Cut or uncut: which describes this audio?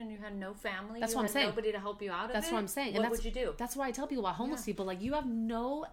uncut